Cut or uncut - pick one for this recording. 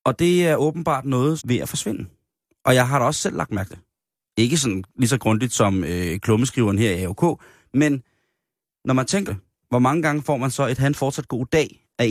cut